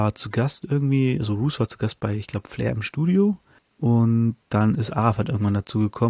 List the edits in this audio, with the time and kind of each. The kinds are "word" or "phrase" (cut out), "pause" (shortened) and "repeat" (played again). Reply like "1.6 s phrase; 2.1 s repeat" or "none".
3.6 s pause